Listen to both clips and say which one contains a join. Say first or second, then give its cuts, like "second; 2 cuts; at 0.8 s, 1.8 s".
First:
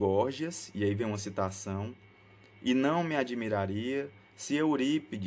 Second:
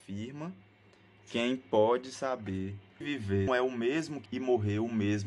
second; 3 cuts; at 3.0 s, 3.5 s, 4.3 s